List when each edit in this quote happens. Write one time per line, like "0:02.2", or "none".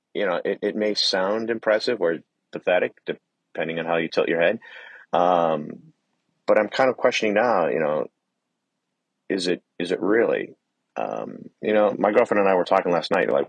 0:05.0
0:09.7
0:11.5